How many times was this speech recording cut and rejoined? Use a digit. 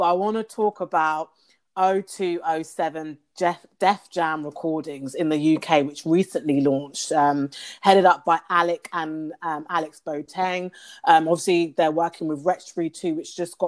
0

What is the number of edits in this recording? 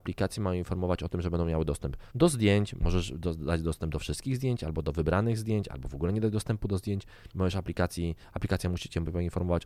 2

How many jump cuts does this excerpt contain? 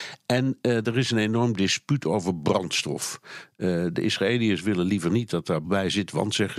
1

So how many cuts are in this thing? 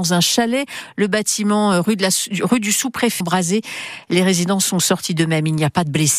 1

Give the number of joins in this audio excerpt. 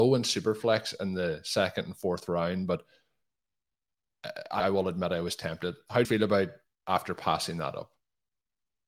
3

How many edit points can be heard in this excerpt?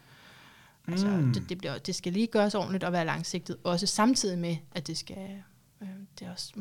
1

